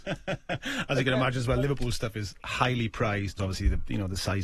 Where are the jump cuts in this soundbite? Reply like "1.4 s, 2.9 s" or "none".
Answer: 3.4 s